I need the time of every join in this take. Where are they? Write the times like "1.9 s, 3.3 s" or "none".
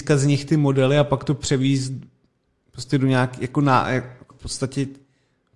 4.3 s